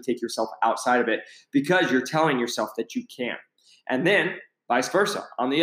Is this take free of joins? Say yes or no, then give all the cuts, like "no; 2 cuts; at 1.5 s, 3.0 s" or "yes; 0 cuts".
yes; 0 cuts